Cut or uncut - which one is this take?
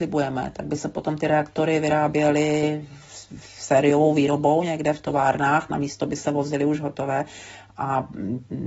uncut